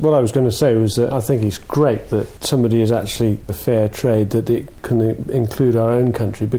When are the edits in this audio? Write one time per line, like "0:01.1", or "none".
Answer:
0:01.1
0:03.5

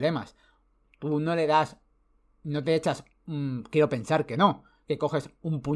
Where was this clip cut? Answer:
none

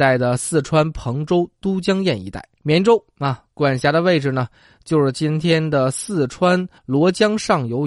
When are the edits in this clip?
0:02.5
0:06.8

